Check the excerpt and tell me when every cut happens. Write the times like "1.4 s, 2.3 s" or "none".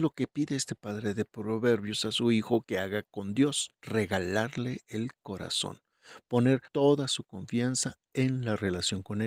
3.7 s, 6.7 s

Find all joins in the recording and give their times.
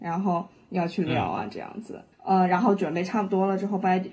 2.1 s

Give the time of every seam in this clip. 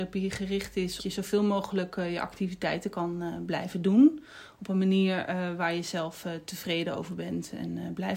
1.0 s

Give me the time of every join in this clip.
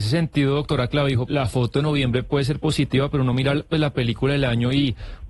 1.3 s

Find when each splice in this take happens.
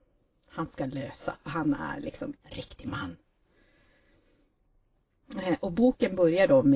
1.4 s, 2.4 s

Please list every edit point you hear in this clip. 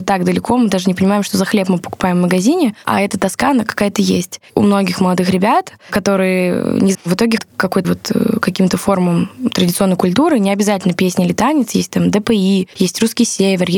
6.9 s, 7.4 s, 7.8 s

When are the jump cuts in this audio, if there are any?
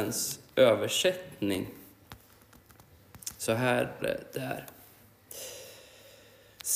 4.0 s

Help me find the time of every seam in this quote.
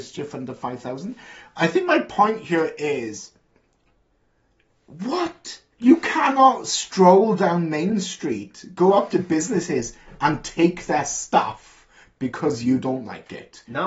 5.7 s

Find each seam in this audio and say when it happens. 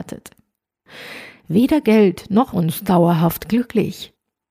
2.5 s

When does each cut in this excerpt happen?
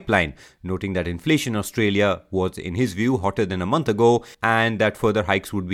4.3 s

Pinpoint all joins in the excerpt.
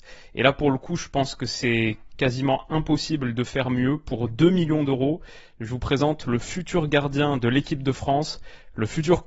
none

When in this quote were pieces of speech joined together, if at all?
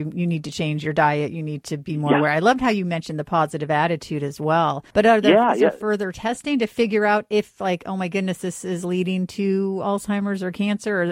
4.9 s

